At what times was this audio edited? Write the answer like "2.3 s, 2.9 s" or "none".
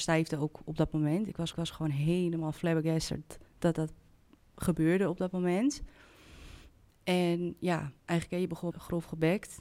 1.5 s, 3.5 s, 8.0 s, 8.7 s